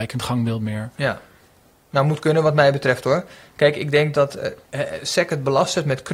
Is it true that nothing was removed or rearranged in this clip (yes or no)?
yes